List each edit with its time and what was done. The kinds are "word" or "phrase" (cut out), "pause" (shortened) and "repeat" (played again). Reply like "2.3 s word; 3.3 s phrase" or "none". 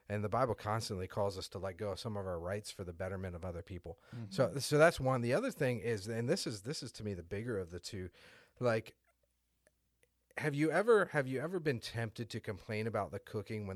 none